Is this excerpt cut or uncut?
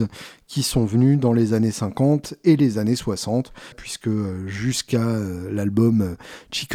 cut